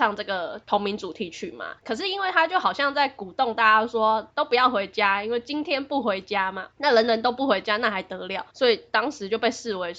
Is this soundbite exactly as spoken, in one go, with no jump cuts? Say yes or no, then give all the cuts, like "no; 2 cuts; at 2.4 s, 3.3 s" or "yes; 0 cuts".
no; 2 cuts; at 1.8 s, 8.5 s